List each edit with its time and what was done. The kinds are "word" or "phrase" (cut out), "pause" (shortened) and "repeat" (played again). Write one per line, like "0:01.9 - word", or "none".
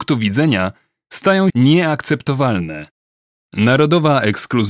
0:01.5 - word